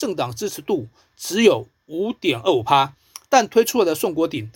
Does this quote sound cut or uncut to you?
uncut